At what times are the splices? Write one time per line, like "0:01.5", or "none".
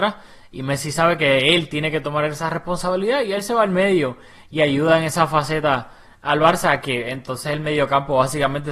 none